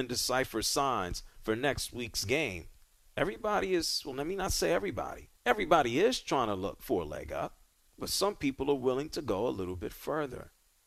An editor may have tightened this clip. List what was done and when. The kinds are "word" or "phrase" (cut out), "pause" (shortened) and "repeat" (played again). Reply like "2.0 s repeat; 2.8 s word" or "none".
2.8 s pause; 5.4 s pause; 7.8 s pause